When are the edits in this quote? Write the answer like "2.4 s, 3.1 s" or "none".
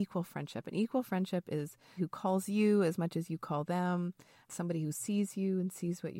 2.0 s, 4.4 s